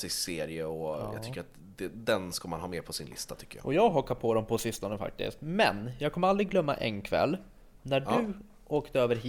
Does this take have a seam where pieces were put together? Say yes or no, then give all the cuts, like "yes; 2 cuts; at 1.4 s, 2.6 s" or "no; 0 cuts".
no; 0 cuts